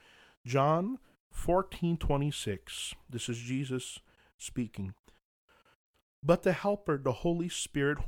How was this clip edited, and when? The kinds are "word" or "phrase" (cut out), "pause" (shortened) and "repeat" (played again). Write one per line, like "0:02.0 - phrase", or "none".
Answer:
none